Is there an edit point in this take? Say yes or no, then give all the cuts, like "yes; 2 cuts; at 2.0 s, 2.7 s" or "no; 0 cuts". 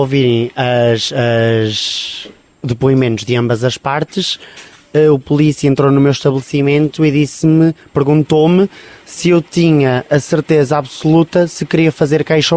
no; 0 cuts